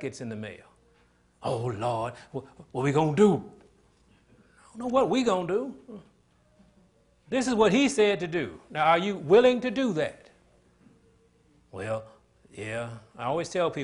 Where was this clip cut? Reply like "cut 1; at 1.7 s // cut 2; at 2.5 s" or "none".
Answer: none